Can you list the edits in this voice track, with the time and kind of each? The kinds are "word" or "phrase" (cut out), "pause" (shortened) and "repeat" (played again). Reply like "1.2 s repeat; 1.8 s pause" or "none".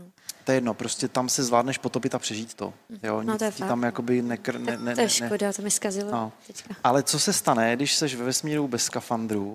none